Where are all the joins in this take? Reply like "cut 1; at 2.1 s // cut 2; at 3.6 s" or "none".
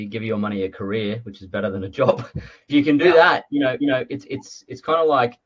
cut 1; at 2.7 s // cut 2; at 3.8 s